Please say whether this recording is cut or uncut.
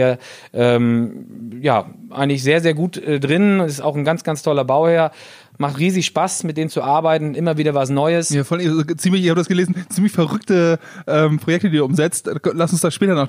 uncut